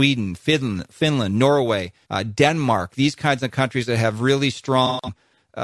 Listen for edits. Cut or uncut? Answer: cut